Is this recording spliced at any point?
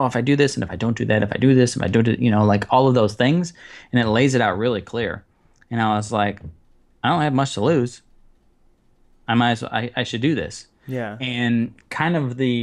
no; 0 cuts

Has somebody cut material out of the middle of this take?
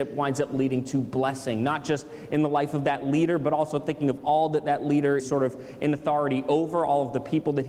yes; 1 cut; at 5.2 s

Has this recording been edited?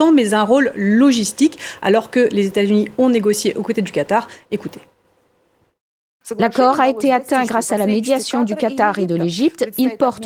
no; 0 cuts

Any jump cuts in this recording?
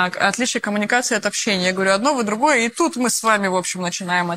no; 0 cuts

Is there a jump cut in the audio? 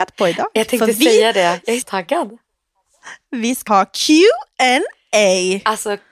yes; 2 cuts; at 1.8 s, 3.7 s

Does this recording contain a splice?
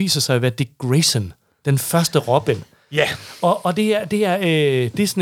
no; 0 cuts

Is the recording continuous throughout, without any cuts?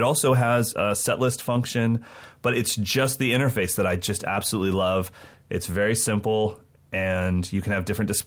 yes; 0 cuts

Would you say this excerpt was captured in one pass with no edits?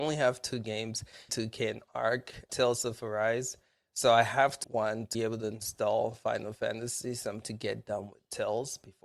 no; 5 cuts; at 1.3 s, 2.5 s, 4.6 s, 5.1 s, 7.4 s

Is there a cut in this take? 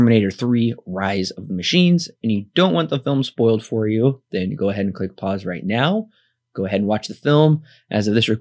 no; 0 cuts

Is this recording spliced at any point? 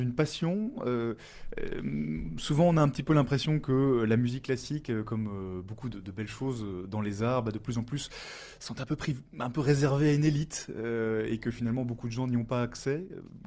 no; 0 cuts

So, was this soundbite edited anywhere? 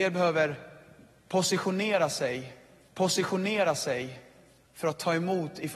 yes; 1 cut; at 2.9 s

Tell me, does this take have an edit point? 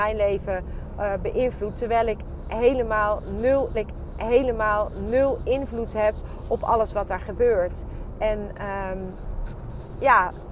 yes; 1 cut; at 3.7 s

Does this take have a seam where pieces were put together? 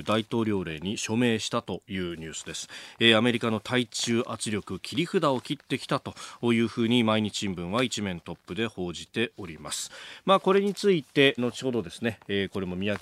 yes; 1 cut; at 11.4 s

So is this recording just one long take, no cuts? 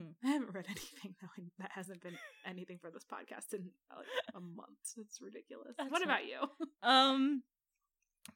no; 1 cut; at 6.7 s

